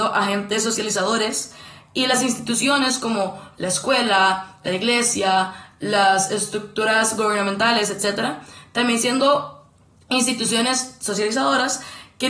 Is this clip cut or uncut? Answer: uncut